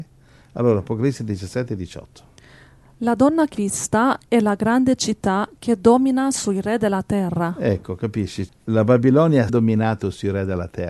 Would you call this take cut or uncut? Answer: cut